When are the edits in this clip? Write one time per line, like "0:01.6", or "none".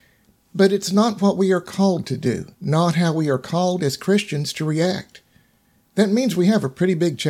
0:02.5